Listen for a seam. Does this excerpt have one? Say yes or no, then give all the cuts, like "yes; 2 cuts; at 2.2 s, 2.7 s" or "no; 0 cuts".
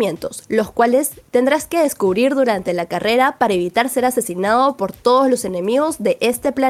no; 0 cuts